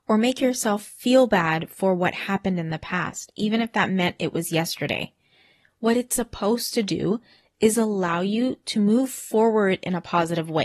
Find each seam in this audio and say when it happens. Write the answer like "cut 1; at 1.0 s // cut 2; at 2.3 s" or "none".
none

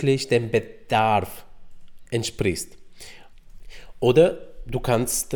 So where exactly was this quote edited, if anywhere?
cut 1; at 2.0 s

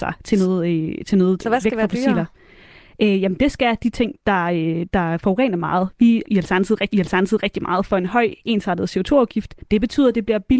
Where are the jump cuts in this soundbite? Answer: cut 1; at 1.4 s // cut 2; at 6.3 s // cut 3; at 6.9 s // cut 4; at 9.6 s

